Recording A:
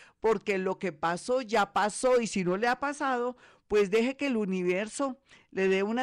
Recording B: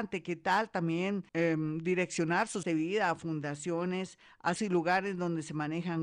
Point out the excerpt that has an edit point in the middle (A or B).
B